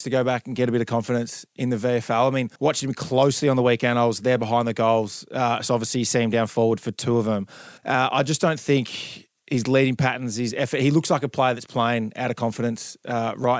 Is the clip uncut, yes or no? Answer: no